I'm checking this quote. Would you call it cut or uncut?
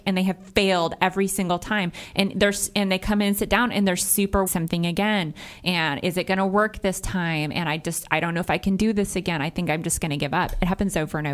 cut